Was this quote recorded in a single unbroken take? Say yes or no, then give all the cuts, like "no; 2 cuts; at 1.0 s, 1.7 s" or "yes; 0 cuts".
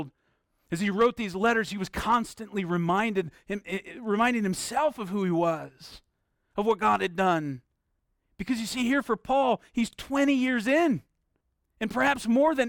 yes; 0 cuts